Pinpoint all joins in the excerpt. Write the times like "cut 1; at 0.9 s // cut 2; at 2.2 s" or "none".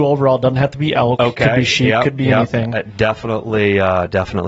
none